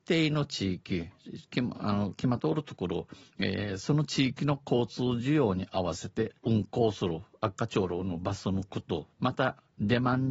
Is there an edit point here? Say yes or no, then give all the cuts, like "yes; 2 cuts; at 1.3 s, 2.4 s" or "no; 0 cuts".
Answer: yes; 3 cuts; at 3.2 s, 6.4 s, 9.1 s